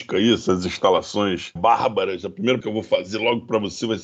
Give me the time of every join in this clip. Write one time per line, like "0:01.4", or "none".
0:01.6
0:02.6

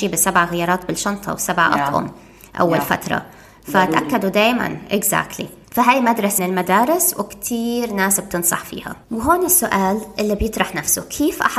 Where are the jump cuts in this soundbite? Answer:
0:05.6
0:06.4
0:09.0

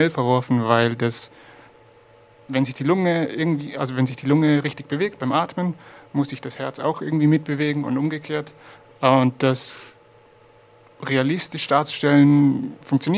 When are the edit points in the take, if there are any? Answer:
none

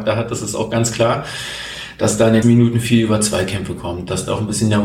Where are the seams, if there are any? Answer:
0:02.4

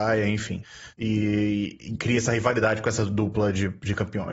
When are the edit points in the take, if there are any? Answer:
0:02.0

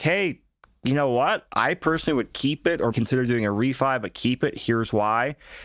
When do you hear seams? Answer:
0:02.9

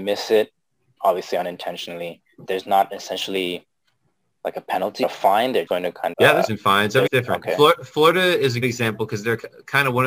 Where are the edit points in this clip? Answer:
0:01.0
0:02.5
0:05.0
0:05.7
0:06.1
0:06.5
0:07.1
0:08.6

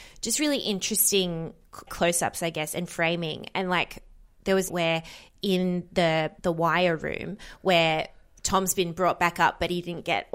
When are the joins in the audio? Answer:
0:01.9
0:04.7
0:06.4

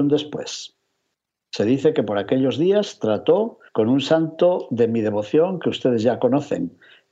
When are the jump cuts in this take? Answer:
0:03.7

